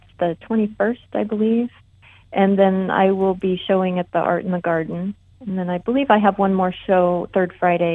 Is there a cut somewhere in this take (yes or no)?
no